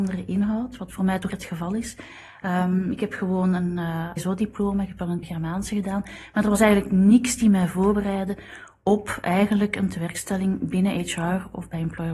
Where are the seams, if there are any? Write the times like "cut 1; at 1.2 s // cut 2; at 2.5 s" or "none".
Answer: cut 1; at 1.3 s // cut 2; at 4.2 s // cut 3; at 5.2 s